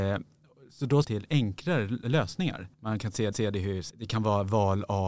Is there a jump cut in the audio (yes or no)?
yes